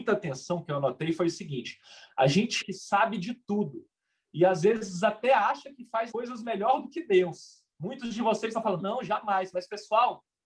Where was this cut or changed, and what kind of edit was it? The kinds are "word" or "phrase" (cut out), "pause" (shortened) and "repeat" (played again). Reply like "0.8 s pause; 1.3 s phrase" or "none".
2.6 s word; 6.1 s word; 7.7 s pause; 8.8 s word

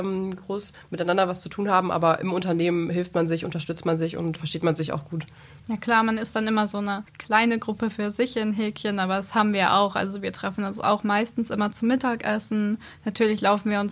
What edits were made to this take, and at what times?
4.4 s word; 5.6 s pause; 7.1 s pause

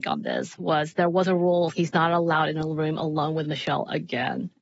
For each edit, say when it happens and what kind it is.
1.7 s word

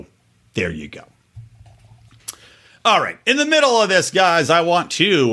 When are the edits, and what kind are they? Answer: none

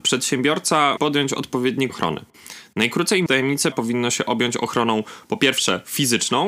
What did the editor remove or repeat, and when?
1.0 s word; 1.9 s phrase; 3.3 s word; 3.7 s word

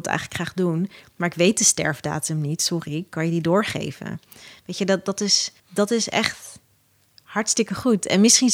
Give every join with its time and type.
5.6 s pause

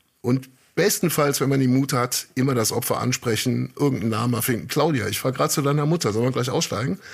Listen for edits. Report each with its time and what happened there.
none

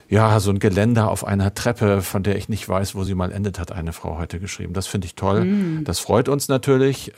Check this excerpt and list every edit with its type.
none

